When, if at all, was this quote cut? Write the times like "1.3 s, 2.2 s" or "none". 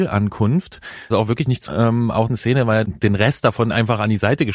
1.1 s, 1.7 s, 2.3 s, 2.8 s